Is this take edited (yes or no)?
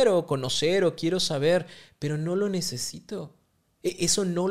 no